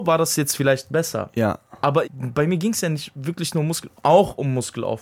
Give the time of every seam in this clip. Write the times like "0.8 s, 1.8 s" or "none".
2.0 s